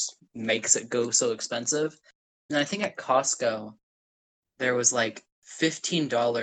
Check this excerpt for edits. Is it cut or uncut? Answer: uncut